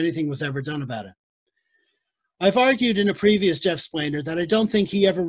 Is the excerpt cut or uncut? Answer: uncut